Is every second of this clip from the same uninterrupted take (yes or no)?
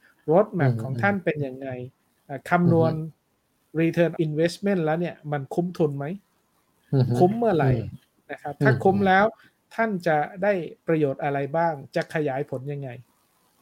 no